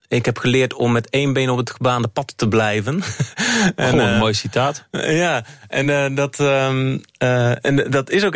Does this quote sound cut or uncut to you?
uncut